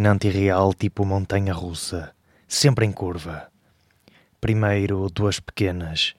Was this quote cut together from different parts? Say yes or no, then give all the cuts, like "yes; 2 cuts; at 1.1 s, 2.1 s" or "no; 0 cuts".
no; 0 cuts